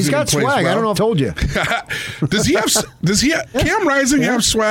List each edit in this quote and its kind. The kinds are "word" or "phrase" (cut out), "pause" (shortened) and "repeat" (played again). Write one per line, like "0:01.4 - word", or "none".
0:00.9 - word
0:03.5 - word